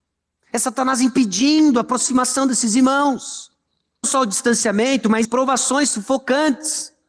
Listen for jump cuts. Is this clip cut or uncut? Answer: cut